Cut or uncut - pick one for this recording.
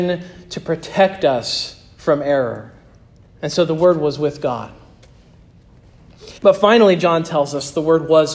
cut